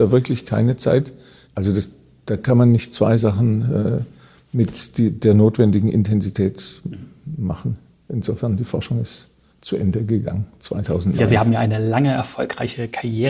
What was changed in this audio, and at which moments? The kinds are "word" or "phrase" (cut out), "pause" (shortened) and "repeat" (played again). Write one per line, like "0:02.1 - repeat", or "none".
none